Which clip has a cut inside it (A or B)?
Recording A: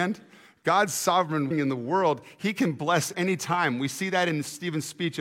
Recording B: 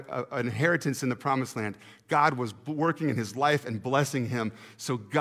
A